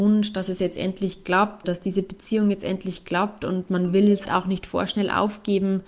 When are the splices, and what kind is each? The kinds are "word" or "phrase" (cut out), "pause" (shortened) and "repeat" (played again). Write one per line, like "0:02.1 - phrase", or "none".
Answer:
0:01.6 - word
0:04.3 - word